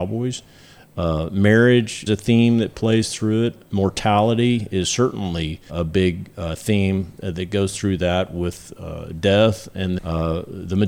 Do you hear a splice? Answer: yes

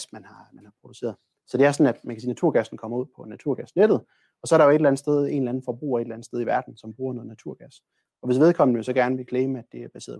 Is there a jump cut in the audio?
no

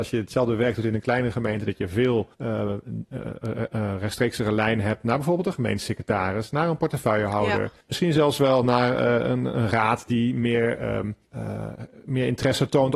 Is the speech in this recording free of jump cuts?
no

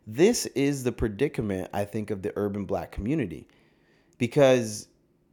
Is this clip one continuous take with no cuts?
yes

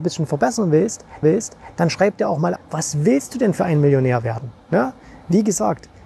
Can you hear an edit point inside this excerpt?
yes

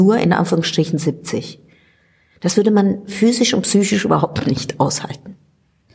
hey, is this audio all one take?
yes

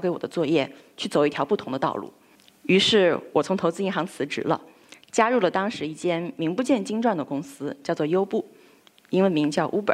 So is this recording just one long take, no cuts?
no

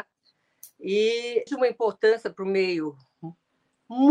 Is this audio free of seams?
no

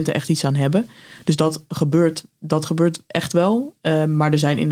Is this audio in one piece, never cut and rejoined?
yes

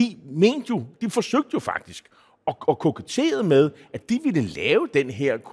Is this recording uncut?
yes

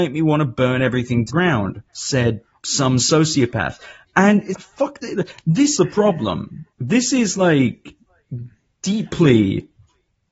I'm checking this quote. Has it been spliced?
yes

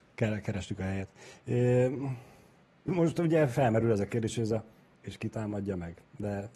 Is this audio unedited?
no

